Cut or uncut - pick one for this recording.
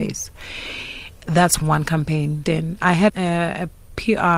cut